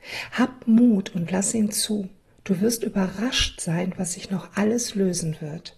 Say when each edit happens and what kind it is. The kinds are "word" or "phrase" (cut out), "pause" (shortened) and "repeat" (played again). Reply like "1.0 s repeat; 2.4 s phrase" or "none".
2.2 s pause

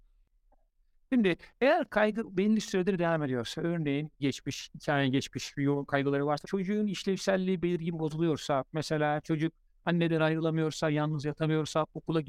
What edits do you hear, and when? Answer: 4.2 s phrase; 6.4 s word

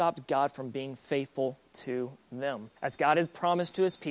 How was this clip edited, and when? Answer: 2.8 s pause

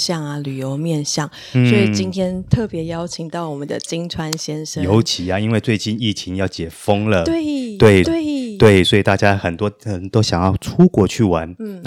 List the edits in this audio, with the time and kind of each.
8.0 s repeat

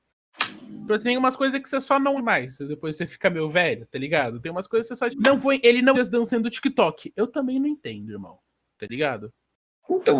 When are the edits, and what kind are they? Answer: 2.2 s word; 5.1 s word; 5.9 s word

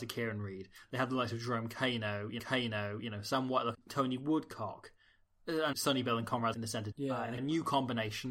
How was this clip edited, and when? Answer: 2.4 s repeat; 3.7 s phrase; 5.7 s word; 6.5 s word; 6.9 s word; 7.4 s phrase

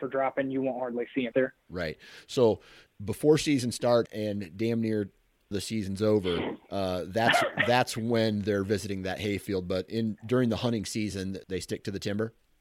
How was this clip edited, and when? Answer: 1.3 s word; 2.9 s word; 4.1 s word; 5.5 s word; 9.9 s word; 11.4 s word

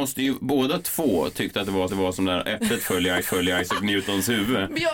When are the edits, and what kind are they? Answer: 1.9 s repeat; 3.2 s repeat

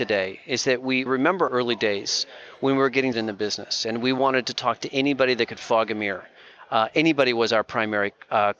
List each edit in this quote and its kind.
1.1 s word; 1.5 s word; 3.1 s word

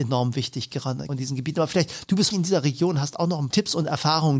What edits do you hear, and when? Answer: 1.1 s word; 2.3 s word; 3.5 s word

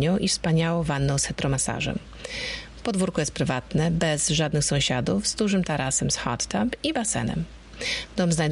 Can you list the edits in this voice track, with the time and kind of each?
none

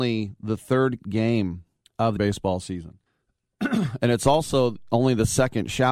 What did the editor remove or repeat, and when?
1.0 s word; 1.9 s pause; 2.2 s word; 3.1 s pause

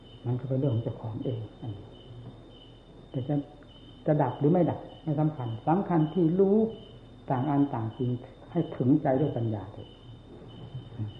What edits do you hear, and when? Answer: none

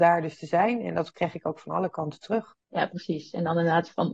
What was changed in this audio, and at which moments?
2.6 s pause

